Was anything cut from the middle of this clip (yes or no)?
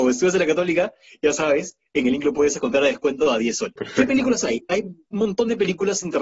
no